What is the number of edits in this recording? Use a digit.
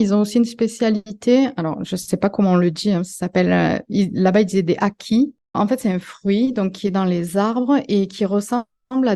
1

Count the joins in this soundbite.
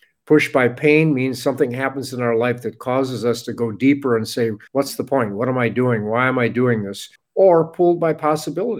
2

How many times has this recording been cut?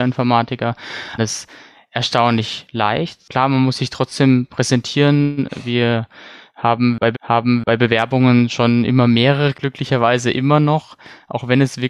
3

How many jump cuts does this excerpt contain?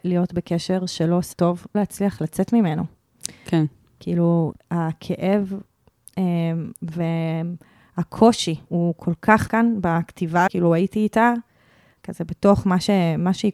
7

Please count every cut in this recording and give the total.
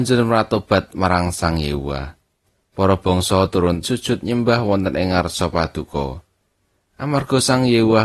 2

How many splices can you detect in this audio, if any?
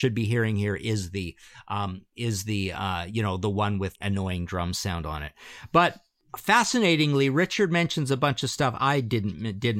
1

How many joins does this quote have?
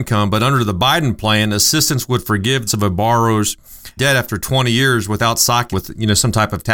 3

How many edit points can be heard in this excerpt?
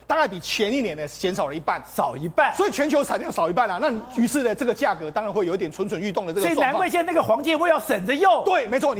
0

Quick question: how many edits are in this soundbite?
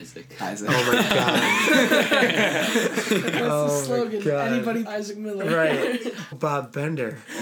2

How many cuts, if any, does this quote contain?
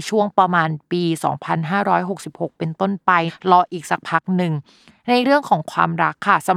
0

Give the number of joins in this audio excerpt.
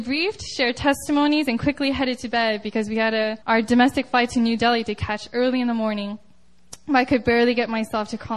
1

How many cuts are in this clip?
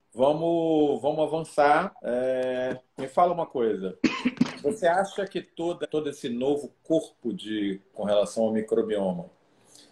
3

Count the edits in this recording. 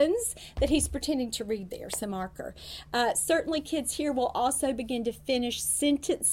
1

